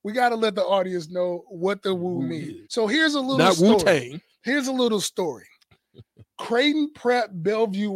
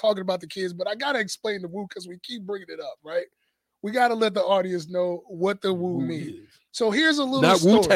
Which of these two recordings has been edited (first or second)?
first